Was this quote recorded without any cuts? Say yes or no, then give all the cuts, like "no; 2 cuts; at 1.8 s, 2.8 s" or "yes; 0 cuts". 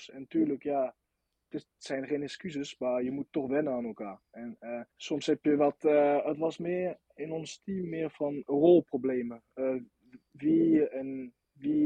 no; 2 cuts; at 4.9 s, 8.4 s